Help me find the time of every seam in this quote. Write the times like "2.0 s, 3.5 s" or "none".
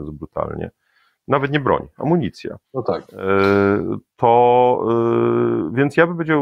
2.6 s